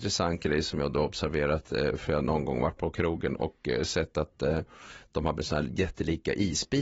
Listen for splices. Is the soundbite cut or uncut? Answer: cut